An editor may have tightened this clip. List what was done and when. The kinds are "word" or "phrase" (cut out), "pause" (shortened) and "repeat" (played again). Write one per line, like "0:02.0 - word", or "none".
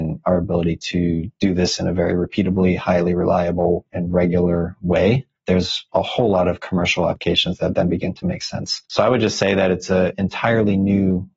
0:05.4 - pause
0:08.9 - pause